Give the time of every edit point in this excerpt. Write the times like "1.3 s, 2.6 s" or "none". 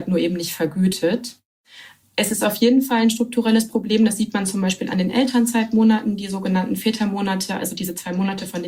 none